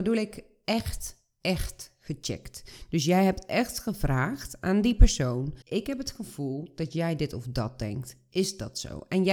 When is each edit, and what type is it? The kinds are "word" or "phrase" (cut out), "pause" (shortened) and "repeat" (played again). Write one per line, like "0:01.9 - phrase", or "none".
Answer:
0:05.6 - pause